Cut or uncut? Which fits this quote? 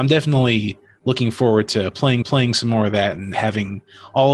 cut